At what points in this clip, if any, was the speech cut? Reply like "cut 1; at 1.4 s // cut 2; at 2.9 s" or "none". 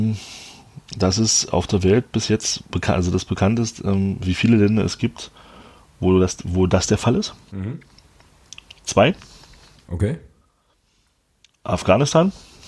none